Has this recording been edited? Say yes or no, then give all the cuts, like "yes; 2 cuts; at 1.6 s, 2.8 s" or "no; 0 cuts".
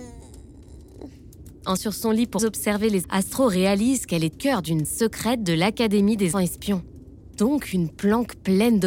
yes; 6 cuts; at 1.8 s, 2.4 s, 3.0 s, 4.3 s, 4.8 s, 6.3 s